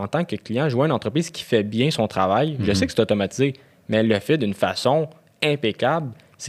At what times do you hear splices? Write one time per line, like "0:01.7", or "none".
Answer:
none